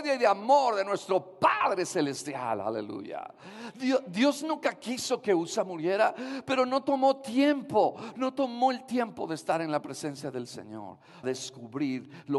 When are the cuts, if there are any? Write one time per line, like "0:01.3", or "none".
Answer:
0:11.2